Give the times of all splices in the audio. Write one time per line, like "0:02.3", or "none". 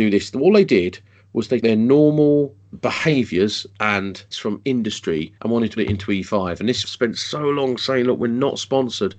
0:01.6
0:02.7
0:04.3
0:05.4
0:05.8
0:06.8